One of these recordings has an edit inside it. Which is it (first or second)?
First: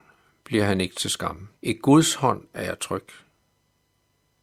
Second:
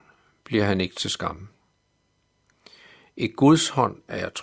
first